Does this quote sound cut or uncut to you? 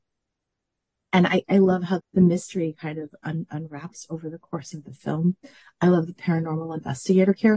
cut